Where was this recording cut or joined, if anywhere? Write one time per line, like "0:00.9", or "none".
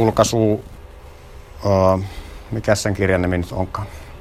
none